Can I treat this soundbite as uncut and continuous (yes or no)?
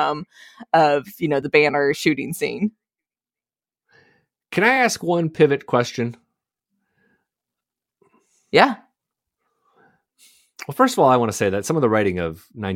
yes